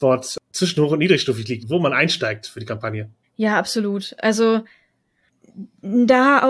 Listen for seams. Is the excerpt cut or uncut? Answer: cut